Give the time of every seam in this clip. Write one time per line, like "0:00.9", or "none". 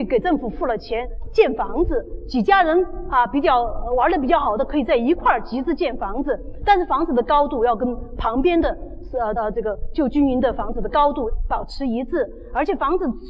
0:09.4